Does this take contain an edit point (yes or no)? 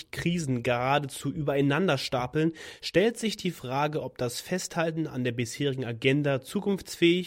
no